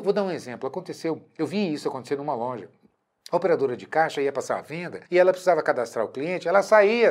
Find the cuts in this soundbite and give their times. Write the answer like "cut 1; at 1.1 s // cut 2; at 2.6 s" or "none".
cut 1; at 5.1 s